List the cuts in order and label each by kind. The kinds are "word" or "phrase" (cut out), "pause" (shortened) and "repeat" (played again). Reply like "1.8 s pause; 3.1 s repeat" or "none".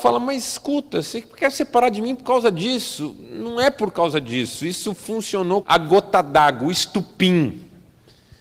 5.6 s word

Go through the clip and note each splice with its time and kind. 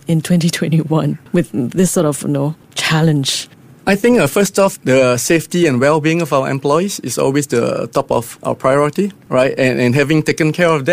none

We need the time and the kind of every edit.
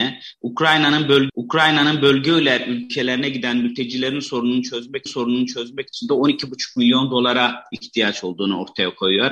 1.3 s repeat; 5.1 s repeat

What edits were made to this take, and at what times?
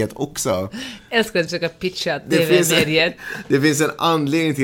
none

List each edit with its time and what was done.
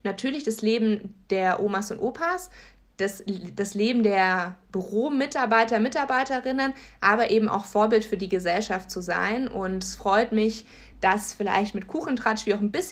none

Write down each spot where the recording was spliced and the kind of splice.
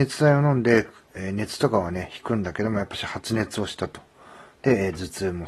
none

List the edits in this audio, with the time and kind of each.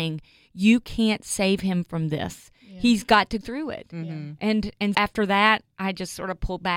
3.4 s word; 4.9 s word

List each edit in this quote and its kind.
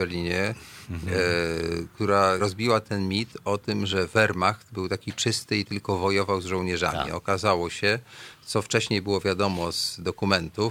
2.4 s word

